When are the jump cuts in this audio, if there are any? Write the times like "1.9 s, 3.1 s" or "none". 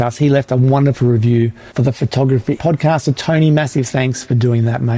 1.7 s, 2.6 s